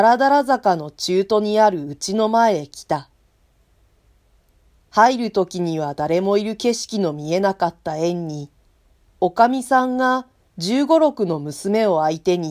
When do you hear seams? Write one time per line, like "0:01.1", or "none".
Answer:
none